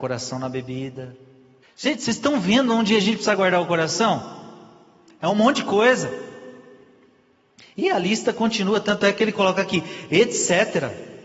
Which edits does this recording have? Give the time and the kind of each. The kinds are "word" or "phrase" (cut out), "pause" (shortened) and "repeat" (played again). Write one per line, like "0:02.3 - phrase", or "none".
0:01.6 - pause

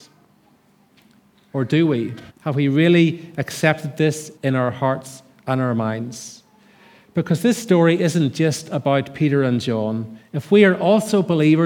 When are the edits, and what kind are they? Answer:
0:02.3 - pause
0:04.4 - pause

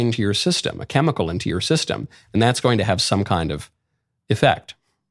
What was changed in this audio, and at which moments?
none

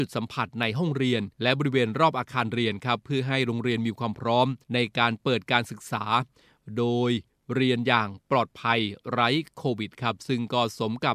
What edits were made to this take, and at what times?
0:01.3 - pause
0:04.6 - pause

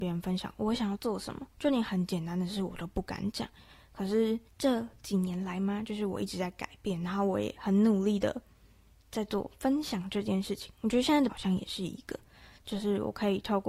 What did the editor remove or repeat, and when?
0:01.5 - pause
0:04.5 - pause
0:11.3 - word

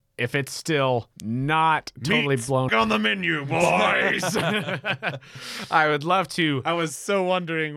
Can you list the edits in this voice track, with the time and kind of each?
0:01.1 - pause
0:02.7 - word

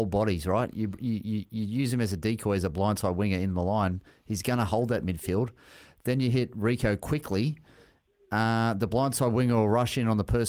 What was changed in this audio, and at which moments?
none

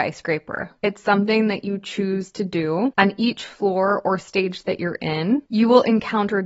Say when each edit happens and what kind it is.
none

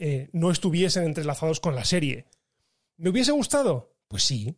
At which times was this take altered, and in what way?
none

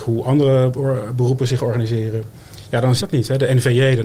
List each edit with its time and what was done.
0:03.0 - word

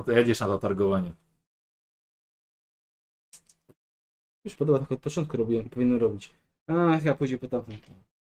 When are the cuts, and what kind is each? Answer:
0:04.6 - phrase

